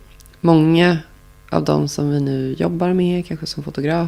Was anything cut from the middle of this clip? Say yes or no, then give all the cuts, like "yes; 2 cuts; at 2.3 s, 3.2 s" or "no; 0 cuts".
no; 0 cuts